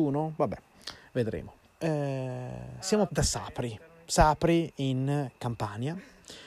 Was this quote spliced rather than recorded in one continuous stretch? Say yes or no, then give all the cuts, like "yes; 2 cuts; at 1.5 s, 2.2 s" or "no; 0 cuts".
yes; 2 cuts; at 1.6 s, 3.1 s